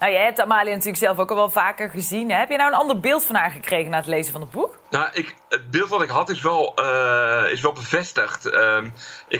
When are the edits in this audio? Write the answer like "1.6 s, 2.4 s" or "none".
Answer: 4.8 s